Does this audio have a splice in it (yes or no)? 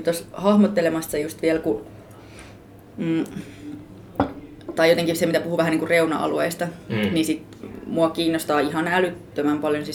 no